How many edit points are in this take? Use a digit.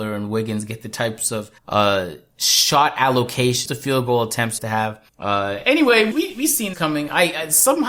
6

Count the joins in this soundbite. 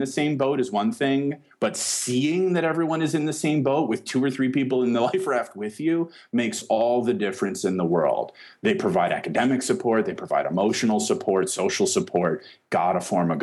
0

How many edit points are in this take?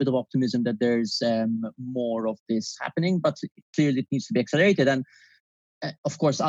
0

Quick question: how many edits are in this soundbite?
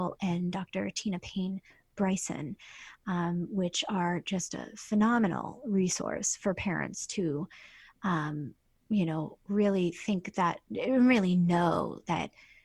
0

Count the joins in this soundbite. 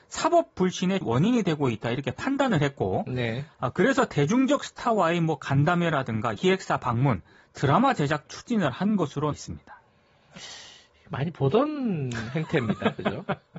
4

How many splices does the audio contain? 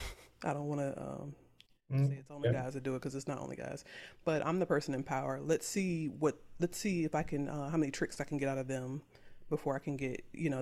0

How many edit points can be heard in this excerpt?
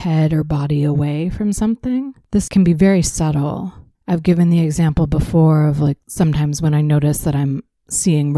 1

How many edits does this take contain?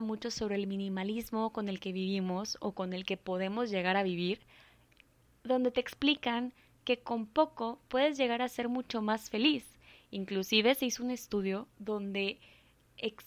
0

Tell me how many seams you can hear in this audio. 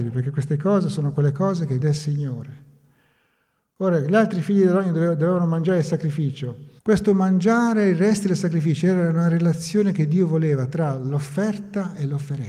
2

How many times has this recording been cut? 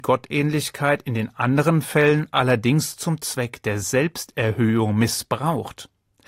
0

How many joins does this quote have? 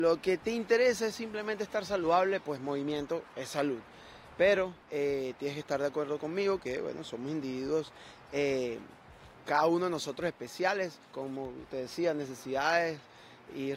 2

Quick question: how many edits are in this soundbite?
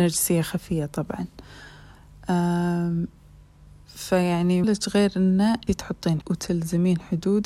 3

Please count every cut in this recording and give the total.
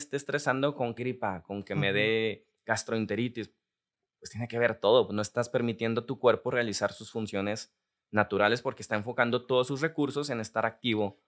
1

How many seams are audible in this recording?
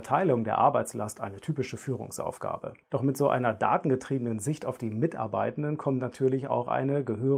1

